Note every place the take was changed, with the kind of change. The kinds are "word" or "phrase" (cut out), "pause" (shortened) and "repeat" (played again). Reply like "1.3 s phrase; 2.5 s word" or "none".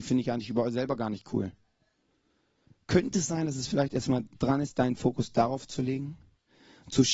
none